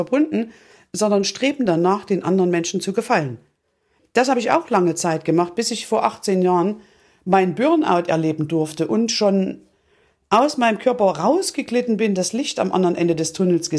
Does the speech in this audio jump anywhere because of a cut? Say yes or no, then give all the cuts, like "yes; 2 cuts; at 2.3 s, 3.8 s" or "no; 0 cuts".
no; 0 cuts